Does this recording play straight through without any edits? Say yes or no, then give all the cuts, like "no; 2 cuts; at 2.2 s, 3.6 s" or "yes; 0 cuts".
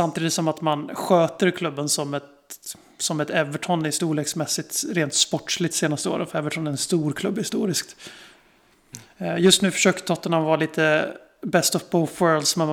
yes; 0 cuts